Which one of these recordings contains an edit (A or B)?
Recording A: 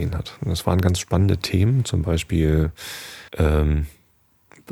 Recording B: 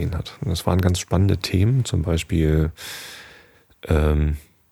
A